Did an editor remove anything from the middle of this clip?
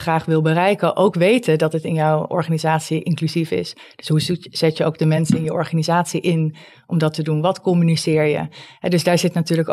no; 0 cuts

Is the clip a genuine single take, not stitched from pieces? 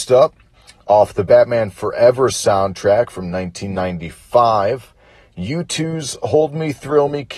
yes; 0 cuts

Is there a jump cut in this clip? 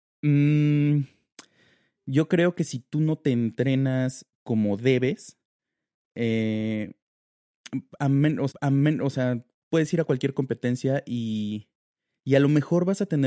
yes; 1 cut; at 8.5 s

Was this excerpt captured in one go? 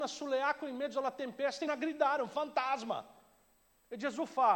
no; 1 cut; at 1.7 s

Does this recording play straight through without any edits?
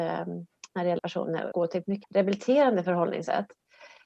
no; 3 cuts; at 1.0 s, 1.5 s, 2.0 s

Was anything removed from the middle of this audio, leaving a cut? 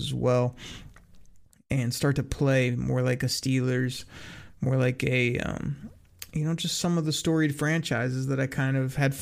no; 0 cuts

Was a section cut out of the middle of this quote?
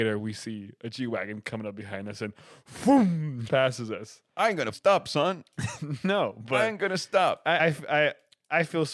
yes; 3 cuts; at 3.5 s, 4.7 s, 7.6 s

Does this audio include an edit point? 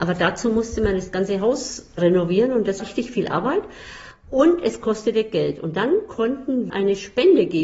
yes; 2 cuts; at 2.8 s, 6.7 s

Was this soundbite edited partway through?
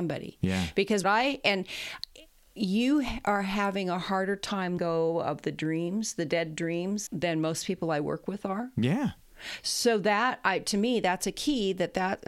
yes; 3 cuts; at 1.0 s, 4.8 s, 7.1 s

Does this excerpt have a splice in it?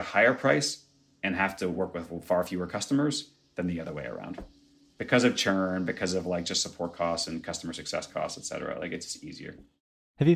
no; 0 cuts

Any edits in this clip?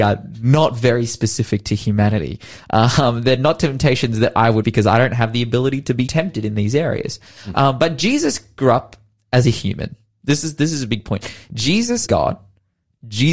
yes; 3 cuts; at 4.6 s, 6.1 s, 12.1 s

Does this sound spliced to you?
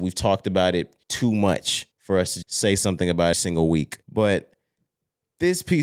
yes; 5 cuts; at 1.0 s, 1.9 s, 2.4 s, 3.3 s, 4.0 s

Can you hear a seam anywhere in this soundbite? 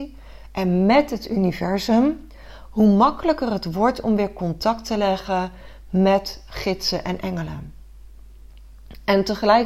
no; 0 cuts

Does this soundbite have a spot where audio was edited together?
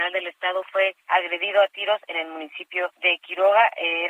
yes; 2 cuts; at 1.0 s, 2.9 s

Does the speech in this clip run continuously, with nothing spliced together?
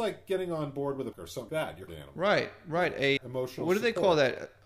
no; 4 cuts; at 1.1 s, 1.5 s, 1.9 s, 3.2 s

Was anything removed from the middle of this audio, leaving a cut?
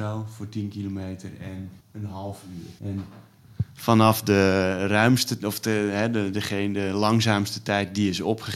yes; 2 cuts; at 1.8 s, 2.8 s

